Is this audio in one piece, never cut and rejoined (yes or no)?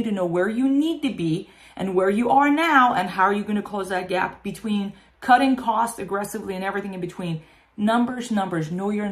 yes